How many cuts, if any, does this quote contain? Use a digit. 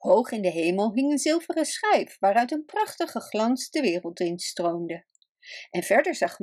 0